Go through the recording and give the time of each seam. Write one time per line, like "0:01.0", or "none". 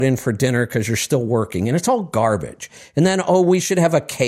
none